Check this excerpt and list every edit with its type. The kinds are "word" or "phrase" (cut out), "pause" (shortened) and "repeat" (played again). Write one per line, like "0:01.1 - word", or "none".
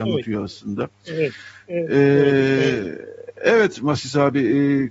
none